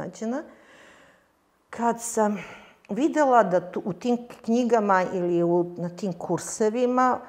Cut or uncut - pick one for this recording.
uncut